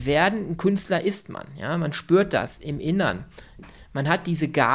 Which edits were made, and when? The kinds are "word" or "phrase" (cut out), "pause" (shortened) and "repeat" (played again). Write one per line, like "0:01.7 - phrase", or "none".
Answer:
none